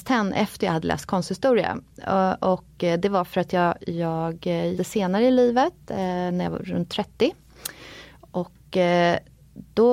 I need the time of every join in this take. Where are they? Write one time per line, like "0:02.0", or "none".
0:04.8